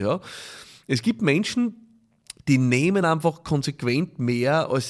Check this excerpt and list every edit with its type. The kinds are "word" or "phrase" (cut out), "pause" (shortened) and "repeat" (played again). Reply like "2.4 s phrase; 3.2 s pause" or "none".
none

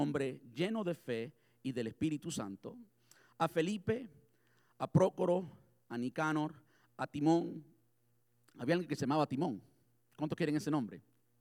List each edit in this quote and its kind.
none

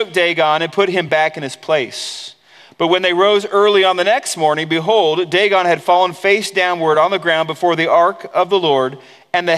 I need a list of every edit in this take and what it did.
none

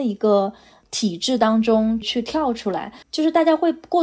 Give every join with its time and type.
3.0 s pause

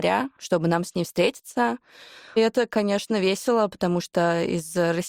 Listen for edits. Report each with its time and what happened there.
none

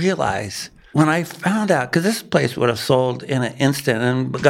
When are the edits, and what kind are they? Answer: 0.9 s word

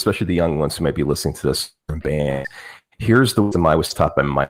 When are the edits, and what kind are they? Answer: 1.8 s pause

